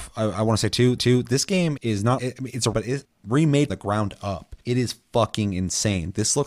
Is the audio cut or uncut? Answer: cut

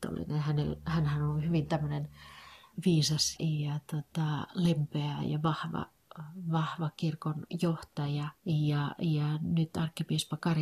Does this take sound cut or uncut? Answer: cut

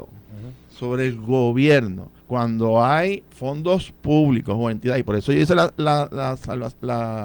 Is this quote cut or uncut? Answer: cut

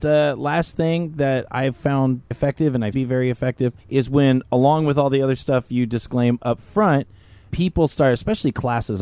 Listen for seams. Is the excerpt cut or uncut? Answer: cut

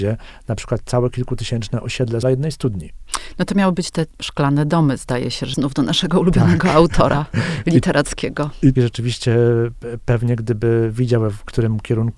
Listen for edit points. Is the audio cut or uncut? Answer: cut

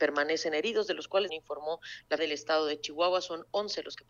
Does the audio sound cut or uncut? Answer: cut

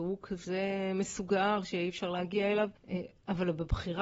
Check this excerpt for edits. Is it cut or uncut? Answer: cut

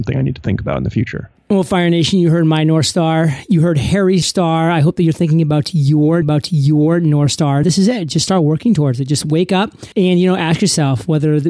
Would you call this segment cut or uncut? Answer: cut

